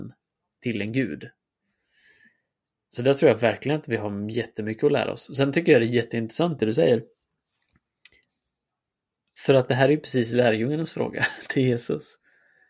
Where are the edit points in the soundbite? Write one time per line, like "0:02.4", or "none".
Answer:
none